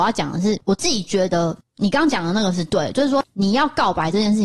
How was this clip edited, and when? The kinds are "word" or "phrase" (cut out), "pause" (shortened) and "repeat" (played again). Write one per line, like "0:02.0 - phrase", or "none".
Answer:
none